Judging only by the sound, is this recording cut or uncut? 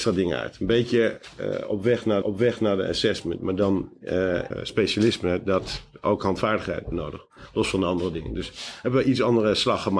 cut